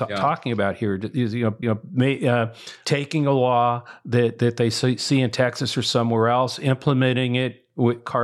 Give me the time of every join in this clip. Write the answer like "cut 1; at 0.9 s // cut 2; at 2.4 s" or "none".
cut 1; at 1.6 s